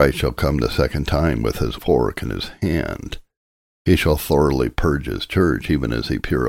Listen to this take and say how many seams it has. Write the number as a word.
one